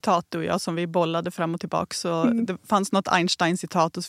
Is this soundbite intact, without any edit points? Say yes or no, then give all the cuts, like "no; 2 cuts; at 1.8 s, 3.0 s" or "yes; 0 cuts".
yes; 0 cuts